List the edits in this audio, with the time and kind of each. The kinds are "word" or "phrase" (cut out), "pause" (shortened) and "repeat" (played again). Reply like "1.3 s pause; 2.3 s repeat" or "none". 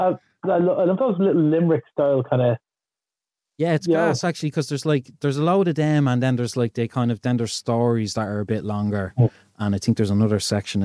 none